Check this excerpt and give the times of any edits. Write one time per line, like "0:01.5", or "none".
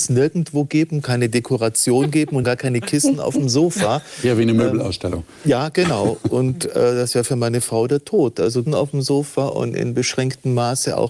0:02.4
0:08.7